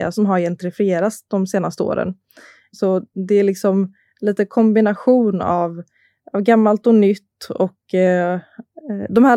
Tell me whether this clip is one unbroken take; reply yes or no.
yes